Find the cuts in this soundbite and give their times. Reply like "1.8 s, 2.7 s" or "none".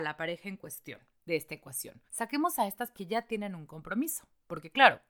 1.1 s, 2.1 s, 2.9 s